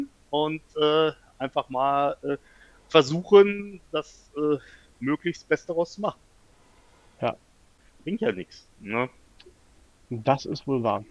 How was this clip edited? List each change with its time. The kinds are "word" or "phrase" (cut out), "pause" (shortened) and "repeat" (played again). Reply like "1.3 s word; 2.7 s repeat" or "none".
8.7 s pause